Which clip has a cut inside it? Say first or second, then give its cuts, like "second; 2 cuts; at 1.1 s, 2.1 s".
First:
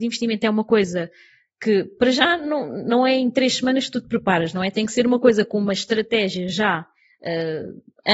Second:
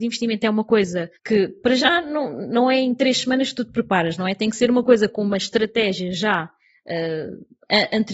second; 1 cut; at 1.2 s